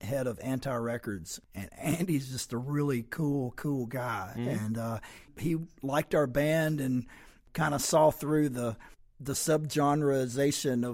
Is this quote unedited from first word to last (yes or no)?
yes